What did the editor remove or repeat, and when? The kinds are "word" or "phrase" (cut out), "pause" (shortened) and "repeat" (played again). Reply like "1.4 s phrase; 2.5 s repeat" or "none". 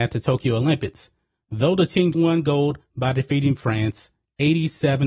2.1 s word